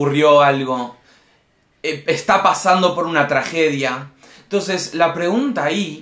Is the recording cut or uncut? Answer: uncut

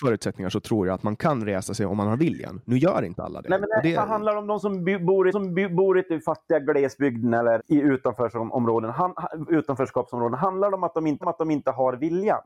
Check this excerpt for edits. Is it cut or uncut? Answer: cut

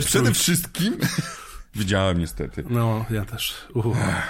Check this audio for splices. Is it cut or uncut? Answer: uncut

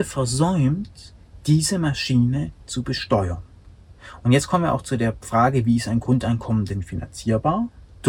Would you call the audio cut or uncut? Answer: uncut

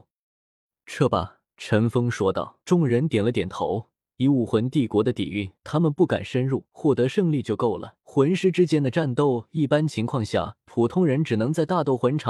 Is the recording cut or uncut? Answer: cut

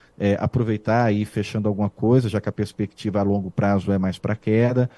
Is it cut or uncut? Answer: uncut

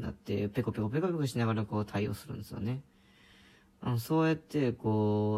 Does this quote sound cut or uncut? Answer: uncut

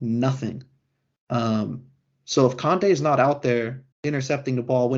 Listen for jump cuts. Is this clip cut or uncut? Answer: cut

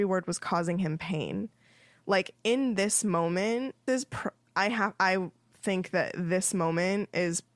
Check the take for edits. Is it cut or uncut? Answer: cut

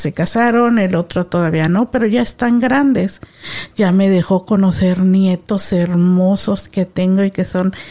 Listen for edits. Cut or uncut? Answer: uncut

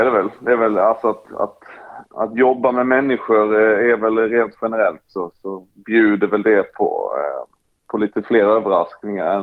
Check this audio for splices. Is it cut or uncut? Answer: uncut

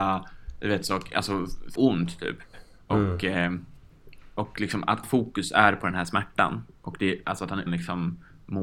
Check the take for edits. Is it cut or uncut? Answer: cut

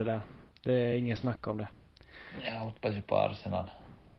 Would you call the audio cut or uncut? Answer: uncut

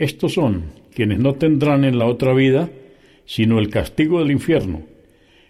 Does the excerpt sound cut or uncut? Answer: uncut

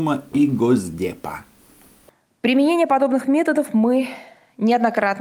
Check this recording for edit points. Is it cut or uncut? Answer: uncut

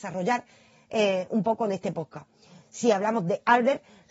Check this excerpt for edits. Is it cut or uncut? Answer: uncut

